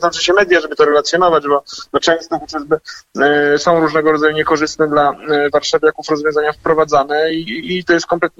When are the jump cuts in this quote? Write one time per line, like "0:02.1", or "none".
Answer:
none